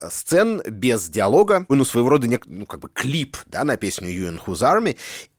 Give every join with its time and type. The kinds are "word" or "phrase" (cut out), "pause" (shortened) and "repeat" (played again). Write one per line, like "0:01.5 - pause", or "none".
0:01.7 - phrase

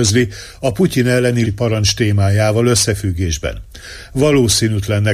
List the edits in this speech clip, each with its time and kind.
0:01.4 - word

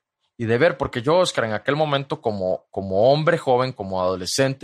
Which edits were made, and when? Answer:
none

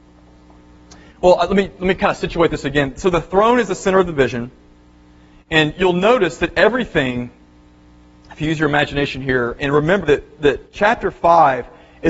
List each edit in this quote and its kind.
0:09.6 - word
0:10.0 - word

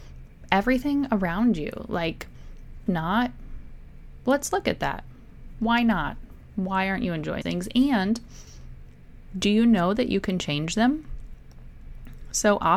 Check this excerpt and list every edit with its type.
0:02.9 - phrase
0:07.4 - word

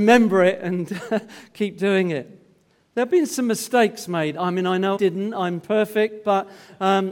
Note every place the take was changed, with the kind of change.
0:04.9 - word

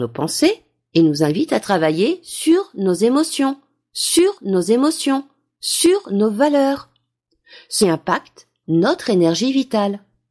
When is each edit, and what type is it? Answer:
0:04.4 - repeat
0:07.8 - word
0:08.6 - word

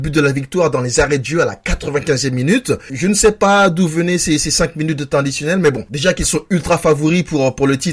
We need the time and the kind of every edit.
none

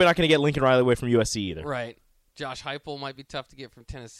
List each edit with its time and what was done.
none

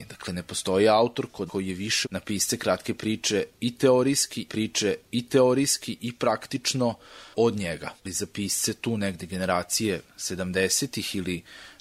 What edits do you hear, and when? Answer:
0:01.5 - word
0:02.0 - word
0:04.5 - repeat
0:08.0 - pause

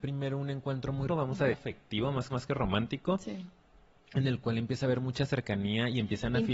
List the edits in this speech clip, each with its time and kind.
0:01.1 - word
0:01.5 - phrase
0:02.3 - repeat

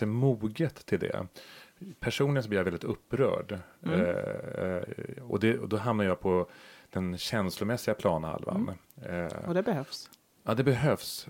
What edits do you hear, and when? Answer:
none

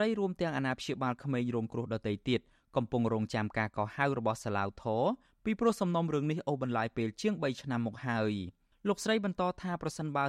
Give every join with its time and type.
none

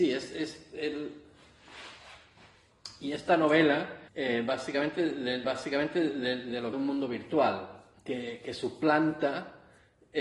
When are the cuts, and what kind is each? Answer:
0:04.1 - pause
0:05.4 - repeat
0:06.7 - phrase
0:07.9 - pause

